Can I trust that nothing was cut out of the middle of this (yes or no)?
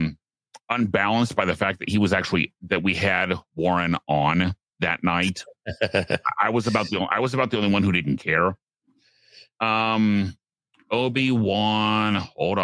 yes